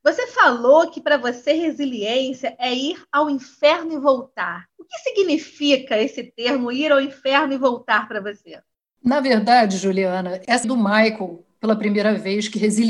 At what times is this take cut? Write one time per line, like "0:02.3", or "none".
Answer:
0:04.7
0:10.6